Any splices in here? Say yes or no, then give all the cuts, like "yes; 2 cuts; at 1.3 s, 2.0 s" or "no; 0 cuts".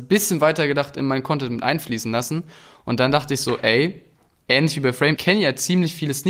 yes; 1 cut; at 5.2 s